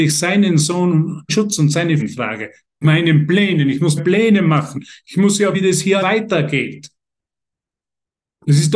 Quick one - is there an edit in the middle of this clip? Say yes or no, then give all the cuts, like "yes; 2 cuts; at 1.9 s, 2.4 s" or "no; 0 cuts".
yes; 6 cuts; at 1.3 s, 2.0 s, 2.8 s, 4.0 s, 5.5 s, 6.0 s